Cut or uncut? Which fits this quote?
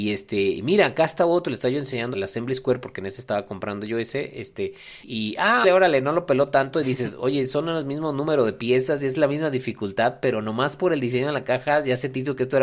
cut